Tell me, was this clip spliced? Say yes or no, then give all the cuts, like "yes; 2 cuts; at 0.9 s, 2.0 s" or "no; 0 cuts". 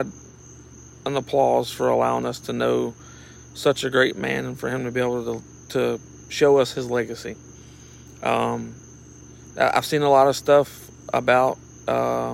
no; 0 cuts